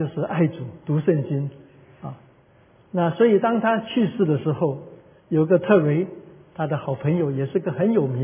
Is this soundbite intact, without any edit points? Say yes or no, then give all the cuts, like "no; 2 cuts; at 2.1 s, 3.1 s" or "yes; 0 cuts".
yes; 0 cuts